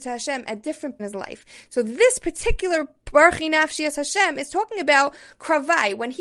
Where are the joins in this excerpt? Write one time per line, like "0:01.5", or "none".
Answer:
0:01.0